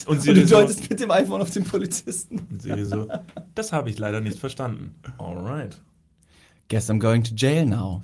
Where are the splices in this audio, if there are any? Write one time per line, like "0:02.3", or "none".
none